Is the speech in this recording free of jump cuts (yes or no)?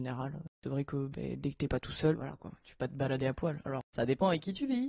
no